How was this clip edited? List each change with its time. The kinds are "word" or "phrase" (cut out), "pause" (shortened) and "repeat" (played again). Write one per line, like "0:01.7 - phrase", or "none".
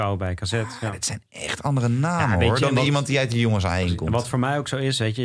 none